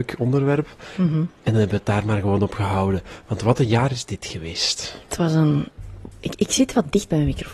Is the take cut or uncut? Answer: uncut